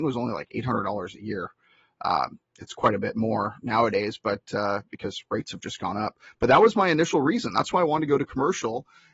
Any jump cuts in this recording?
no; 0 cuts

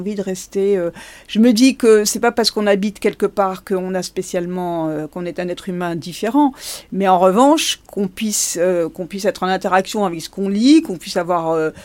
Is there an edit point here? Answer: no; 0 cuts

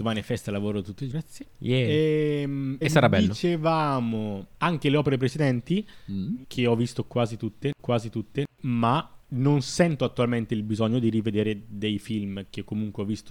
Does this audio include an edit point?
yes; 4 cuts; at 1.1 s, 2.8 s, 4.5 s, 7.8 s

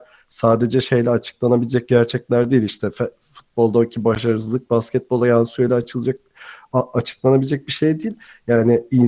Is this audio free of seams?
yes; 0 cuts

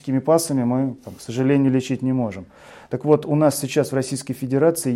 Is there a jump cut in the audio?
no; 0 cuts

